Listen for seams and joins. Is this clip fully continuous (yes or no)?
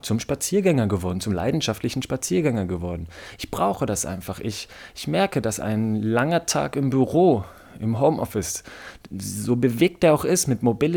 yes